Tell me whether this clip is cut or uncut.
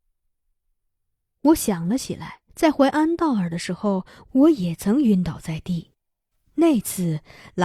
cut